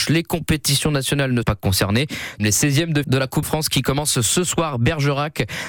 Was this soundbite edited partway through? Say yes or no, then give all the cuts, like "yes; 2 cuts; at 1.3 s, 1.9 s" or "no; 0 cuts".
yes; 4 cuts; at 1.4 s, 2.4 s, 3.0 s, 3.4 s